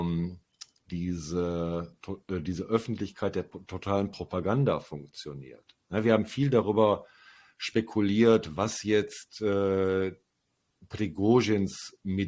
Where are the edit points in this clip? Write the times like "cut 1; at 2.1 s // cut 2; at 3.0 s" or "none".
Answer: none